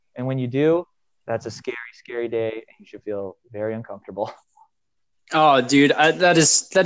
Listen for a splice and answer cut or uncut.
uncut